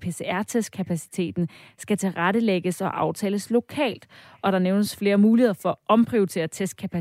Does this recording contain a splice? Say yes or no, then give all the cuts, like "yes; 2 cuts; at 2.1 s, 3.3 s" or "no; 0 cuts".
no; 0 cuts